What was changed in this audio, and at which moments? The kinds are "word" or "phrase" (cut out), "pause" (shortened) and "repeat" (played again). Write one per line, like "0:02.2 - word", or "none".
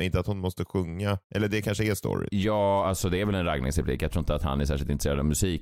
0:01.2 - pause